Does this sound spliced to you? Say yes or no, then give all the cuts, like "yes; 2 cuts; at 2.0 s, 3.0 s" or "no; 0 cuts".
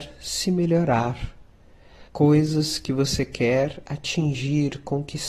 yes; 1 cut; at 2.1 s